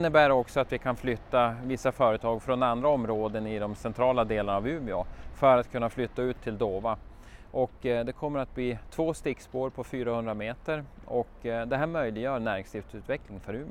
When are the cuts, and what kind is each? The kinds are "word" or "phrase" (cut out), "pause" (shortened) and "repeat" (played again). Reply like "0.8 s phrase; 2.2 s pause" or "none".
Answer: none